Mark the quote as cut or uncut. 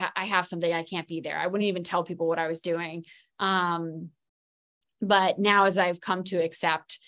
uncut